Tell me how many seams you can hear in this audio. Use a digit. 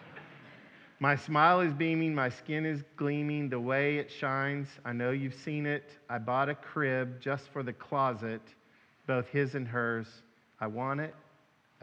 0